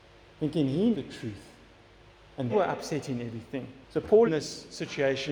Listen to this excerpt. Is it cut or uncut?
cut